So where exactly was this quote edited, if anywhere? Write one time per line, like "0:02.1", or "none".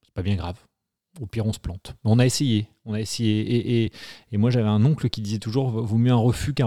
none